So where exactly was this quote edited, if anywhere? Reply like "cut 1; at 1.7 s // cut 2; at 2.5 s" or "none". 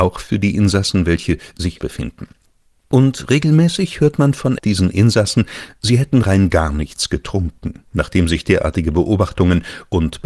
cut 1; at 1.8 s // cut 2; at 4.6 s // cut 3; at 7.9 s